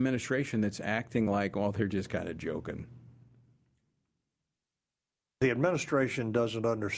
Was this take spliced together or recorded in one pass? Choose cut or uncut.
uncut